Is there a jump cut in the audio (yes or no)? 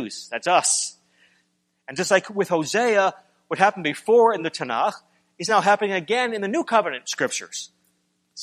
no